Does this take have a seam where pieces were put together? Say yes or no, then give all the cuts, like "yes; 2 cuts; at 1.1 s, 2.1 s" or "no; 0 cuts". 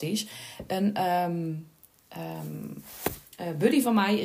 no; 0 cuts